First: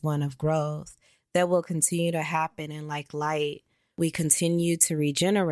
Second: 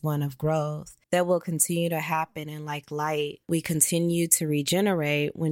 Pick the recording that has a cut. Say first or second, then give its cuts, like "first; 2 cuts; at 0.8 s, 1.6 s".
second; 2 cuts; at 1.0 s, 3.4 s